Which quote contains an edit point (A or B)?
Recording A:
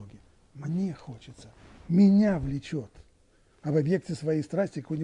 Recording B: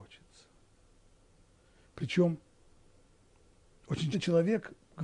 B